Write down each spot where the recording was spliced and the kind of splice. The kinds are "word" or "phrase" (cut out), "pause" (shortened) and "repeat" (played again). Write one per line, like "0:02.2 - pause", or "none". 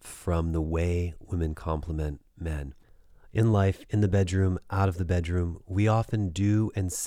none